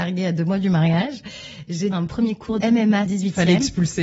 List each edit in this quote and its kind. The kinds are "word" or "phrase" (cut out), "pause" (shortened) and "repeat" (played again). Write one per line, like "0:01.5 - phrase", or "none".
0:01.9 - word
0:02.6 - word
0:03.1 - phrase